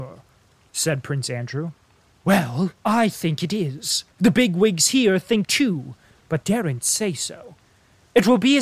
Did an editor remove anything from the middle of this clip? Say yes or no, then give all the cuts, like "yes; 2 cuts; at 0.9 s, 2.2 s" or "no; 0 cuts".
yes; 4 cuts; at 2.8 s, 4.1 s, 5.4 s, 6.4 s